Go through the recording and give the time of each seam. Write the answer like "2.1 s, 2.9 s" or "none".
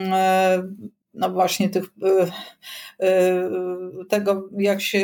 1.0 s